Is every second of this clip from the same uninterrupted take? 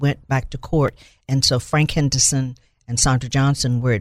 yes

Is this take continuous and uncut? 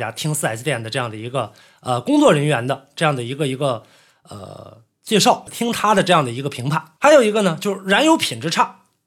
no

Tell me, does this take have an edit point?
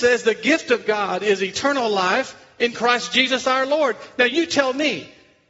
no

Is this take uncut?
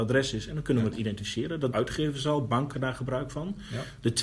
no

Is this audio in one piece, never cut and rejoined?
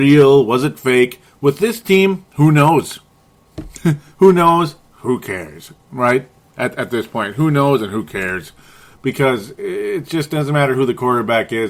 yes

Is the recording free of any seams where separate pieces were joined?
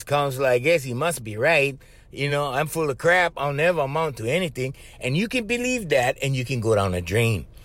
yes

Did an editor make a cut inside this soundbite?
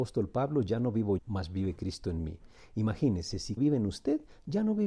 yes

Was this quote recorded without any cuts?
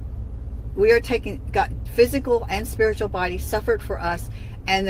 no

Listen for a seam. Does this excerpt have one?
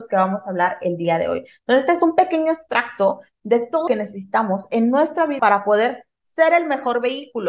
yes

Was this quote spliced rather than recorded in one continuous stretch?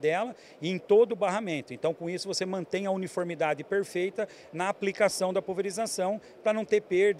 no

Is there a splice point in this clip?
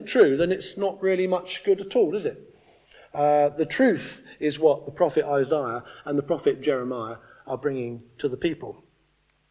no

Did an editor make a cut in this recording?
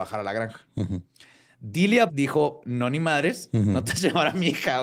yes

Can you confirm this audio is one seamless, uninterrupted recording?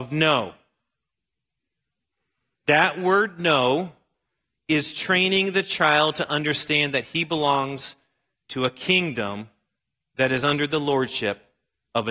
yes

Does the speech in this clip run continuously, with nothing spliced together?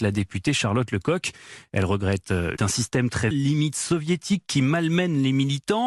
no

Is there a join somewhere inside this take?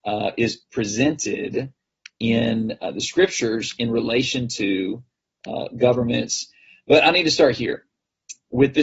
no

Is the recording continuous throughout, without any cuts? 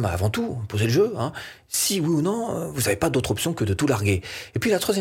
yes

